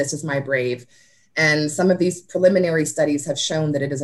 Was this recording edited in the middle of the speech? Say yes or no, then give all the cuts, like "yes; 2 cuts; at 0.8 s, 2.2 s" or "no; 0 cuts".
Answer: no; 0 cuts